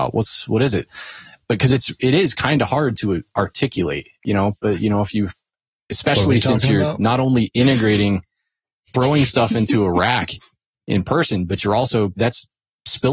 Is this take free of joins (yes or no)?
yes